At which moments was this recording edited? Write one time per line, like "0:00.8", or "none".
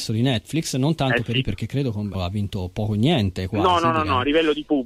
0:01.4
0:02.1

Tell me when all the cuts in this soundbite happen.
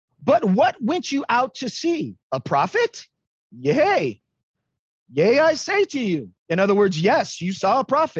0:02.2
0:03.3
0:06.4

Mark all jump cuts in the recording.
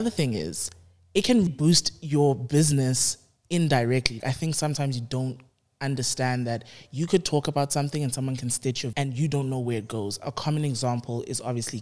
0:01.5
0:04.2
0:08.9

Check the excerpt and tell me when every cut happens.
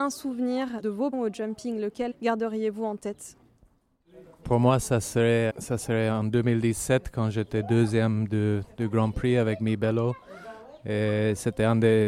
0:01.1
0:02.1
0:04.4
0:05.5

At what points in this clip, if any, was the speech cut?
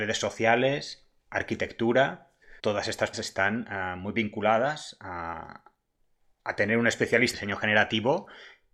0:02.6
0:03.1
0:07.3

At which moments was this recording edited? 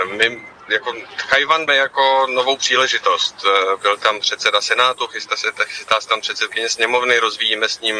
0:01.7

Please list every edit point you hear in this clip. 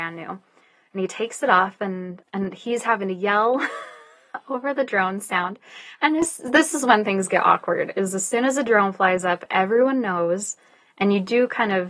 0:02.2

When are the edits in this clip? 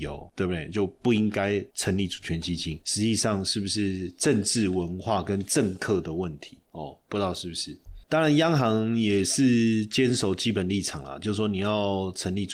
0:08.0

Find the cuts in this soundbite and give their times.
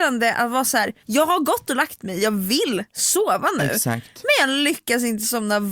0:01.0

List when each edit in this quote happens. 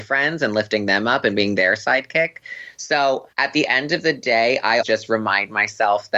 0:03.3
0:04.8

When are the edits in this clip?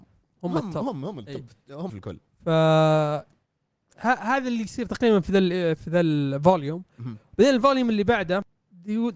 0:01.9

